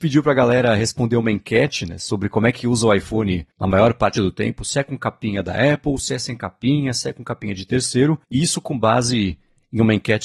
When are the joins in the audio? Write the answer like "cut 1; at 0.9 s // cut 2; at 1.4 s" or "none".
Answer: cut 1; at 3.5 s // cut 2; at 8.2 s

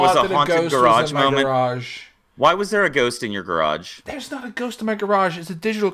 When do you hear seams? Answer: none

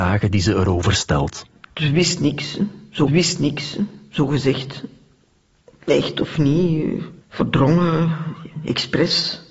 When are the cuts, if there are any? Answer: cut 1; at 3.1 s // cut 2; at 7.2 s

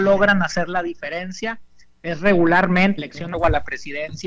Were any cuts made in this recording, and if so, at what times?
cut 1; at 3.0 s // cut 2; at 3.3 s

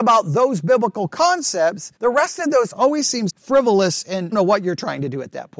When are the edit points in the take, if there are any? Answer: cut 1; at 2.0 s // cut 2; at 2.7 s // cut 3; at 3.3 s // cut 4; at 4.3 s

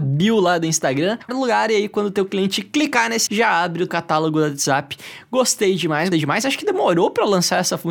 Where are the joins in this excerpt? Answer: cut 1; at 1.3 s // cut 2; at 3.3 s // cut 3; at 3.9 s // cut 4; at 6.1 s

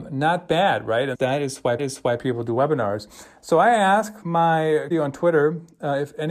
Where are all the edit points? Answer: cut 1; at 1.1 s // cut 2; at 1.8 s // cut 3; at 4.9 s

